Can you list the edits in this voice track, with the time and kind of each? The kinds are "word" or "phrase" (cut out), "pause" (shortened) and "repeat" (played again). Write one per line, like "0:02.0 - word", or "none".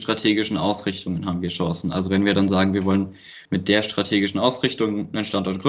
0:03.4 - pause